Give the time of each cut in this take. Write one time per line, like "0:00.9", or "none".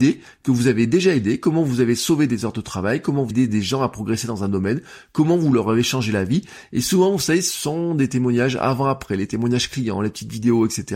0:03.3